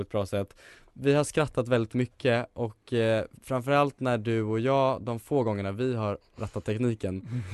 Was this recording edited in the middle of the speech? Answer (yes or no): yes